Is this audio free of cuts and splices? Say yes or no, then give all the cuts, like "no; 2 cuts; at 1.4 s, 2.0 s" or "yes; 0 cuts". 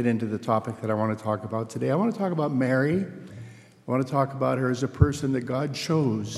yes; 0 cuts